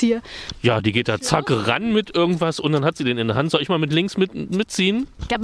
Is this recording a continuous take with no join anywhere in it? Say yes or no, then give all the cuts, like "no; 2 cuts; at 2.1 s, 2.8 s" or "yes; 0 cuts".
yes; 0 cuts